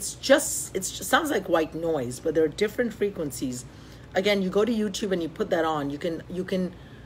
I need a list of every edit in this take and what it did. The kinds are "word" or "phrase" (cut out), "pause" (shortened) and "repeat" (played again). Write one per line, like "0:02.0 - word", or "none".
none